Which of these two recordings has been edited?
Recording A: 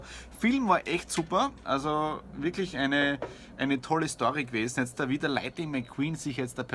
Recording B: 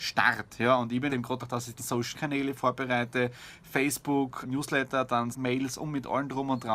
B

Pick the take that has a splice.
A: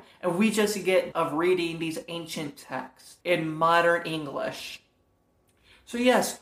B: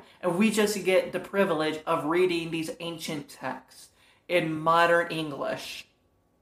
A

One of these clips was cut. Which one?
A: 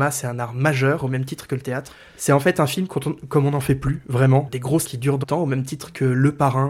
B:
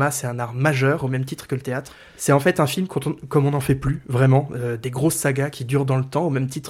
A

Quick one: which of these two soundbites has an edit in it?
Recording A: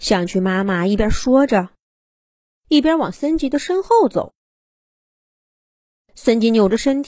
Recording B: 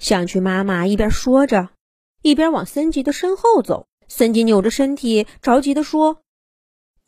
B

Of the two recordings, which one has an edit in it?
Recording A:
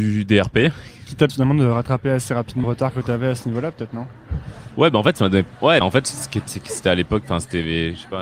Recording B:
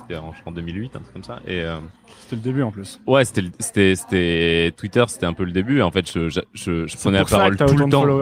A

